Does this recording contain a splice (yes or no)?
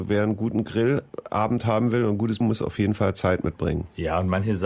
yes